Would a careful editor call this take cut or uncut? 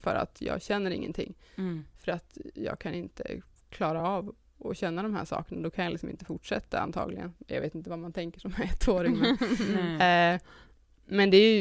uncut